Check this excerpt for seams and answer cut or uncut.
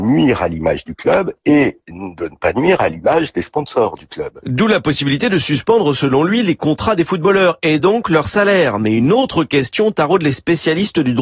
uncut